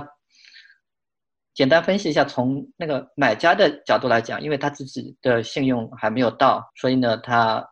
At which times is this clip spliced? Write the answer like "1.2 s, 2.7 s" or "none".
6.7 s

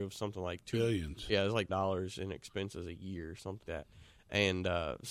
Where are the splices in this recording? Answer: 1.7 s, 3.6 s

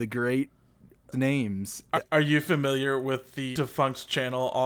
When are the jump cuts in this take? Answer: 1.1 s, 1.9 s, 3.5 s

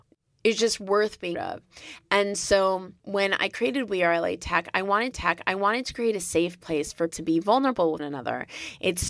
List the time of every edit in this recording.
1.3 s, 3.0 s, 5.1 s, 7.1 s, 8.0 s

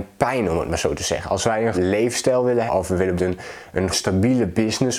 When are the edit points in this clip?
1.7 s, 2.7 s, 3.2 s, 3.9 s

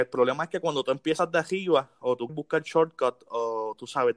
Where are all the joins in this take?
2.3 s

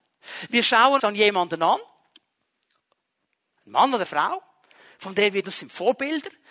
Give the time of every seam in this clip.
1.0 s, 4.0 s, 5.4 s

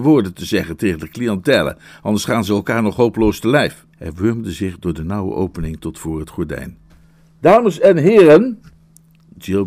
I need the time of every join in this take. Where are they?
3.9 s, 6.9 s

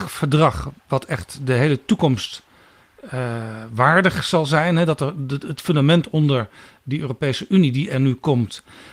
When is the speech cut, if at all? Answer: none

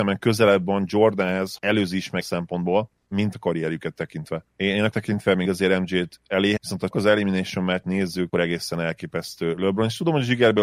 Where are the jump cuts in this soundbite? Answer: 1.6 s, 2.2 s, 3.3 s, 4.9 s, 5.5 s, 6.6 s, 6.9 s, 7.8 s, 8.3 s

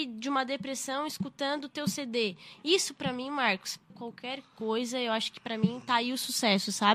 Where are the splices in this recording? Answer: 3.9 s

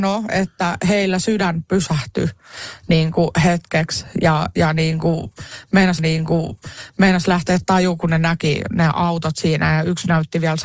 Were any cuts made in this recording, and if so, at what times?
6.0 s

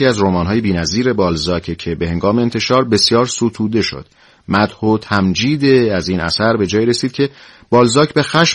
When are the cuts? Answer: none

